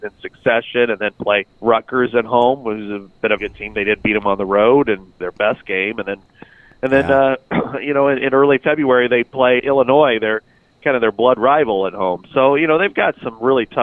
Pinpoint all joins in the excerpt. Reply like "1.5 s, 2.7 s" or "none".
1.5 s, 3.4 s, 5.2 s, 9.6 s